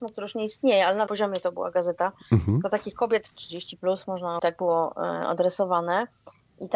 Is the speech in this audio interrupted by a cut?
yes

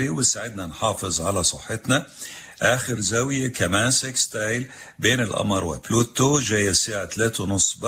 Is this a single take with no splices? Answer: yes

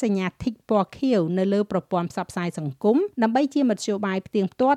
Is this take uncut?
no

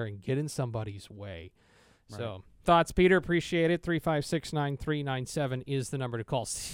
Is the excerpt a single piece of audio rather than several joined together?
no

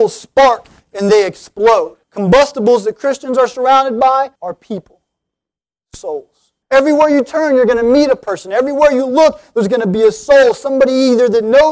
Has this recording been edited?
yes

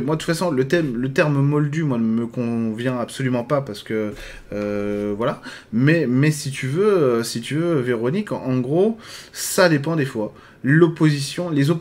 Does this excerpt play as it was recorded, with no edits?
yes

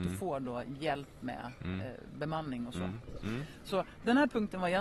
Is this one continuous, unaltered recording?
yes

